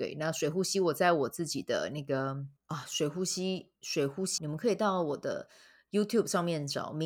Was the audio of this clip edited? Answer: yes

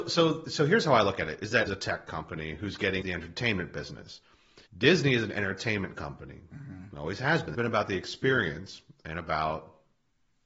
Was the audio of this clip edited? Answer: yes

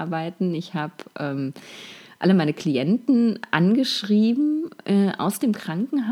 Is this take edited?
no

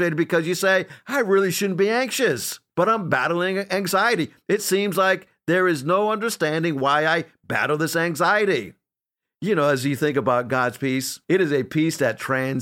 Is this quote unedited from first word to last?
yes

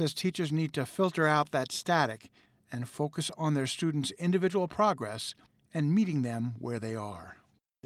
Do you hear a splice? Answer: no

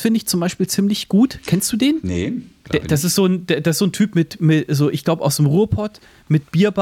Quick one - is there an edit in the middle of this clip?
no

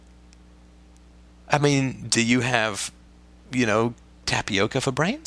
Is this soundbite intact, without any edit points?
yes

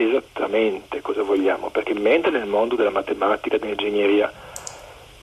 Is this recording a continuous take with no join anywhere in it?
yes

